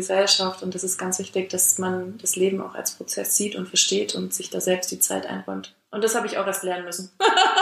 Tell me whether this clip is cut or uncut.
uncut